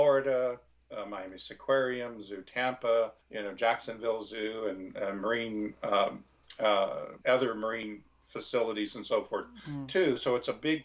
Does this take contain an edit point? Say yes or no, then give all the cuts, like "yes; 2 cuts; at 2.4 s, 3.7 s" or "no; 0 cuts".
yes; 2 cuts; at 3.2 s, 7.2 s